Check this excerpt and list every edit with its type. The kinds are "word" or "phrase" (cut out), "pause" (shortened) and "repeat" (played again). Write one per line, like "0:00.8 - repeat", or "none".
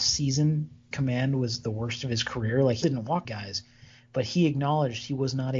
0:00.9 - word
0:02.8 - word
0:03.2 - word